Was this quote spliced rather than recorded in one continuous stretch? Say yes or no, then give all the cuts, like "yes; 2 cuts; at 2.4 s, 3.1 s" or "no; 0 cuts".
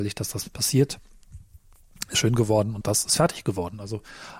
yes; 2 cuts; at 2.1 s, 2.8 s